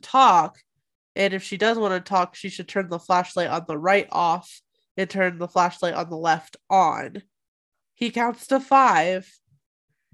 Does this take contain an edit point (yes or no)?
no